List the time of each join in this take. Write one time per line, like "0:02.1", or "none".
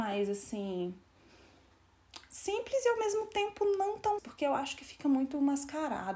0:04.2